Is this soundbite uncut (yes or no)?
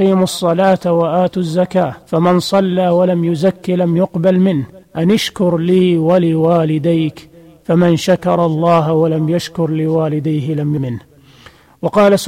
no